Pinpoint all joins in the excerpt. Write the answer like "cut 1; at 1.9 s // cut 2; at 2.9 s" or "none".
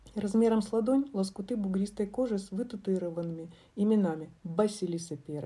cut 1; at 4.4 s